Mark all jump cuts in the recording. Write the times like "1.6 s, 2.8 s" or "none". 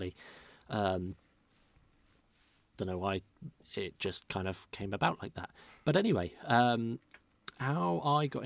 none